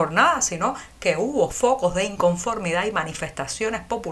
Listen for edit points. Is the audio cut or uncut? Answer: uncut